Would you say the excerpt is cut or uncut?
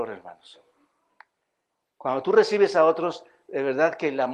uncut